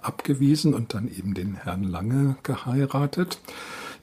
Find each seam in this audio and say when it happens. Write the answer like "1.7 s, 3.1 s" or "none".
none